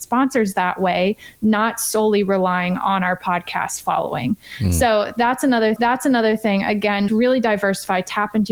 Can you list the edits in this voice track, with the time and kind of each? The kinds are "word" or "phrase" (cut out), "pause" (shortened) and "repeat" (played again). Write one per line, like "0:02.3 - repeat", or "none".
0:05.8 - repeat
0:07.1 - word